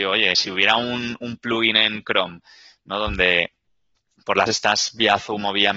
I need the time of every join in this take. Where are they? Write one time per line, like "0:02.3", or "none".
0:04.5